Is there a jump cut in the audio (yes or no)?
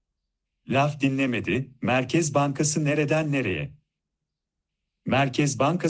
no